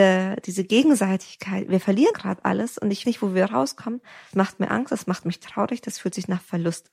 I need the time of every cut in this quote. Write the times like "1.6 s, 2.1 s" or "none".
2.1 s, 3.0 s, 4.3 s